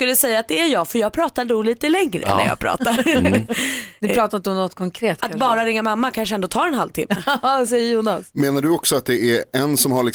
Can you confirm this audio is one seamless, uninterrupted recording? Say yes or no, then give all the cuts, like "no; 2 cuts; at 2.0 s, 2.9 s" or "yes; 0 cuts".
yes; 0 cuts